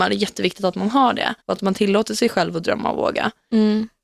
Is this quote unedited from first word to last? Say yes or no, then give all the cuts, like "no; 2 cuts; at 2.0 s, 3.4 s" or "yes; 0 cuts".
no; 1 cut; at 1.4 s